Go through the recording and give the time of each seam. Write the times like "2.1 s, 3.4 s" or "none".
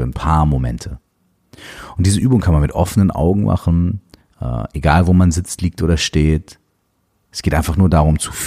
none